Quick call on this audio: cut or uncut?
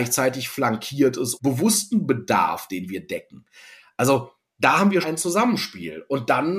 cut